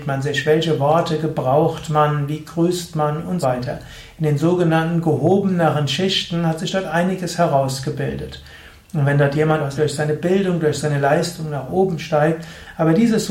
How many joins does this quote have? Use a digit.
2